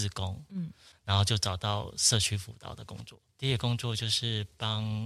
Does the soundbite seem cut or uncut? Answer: cut